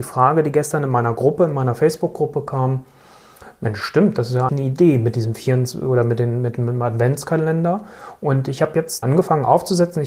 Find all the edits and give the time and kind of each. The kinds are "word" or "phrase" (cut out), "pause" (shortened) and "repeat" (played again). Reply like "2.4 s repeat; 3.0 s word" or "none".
4.5 s word; 9.0 s word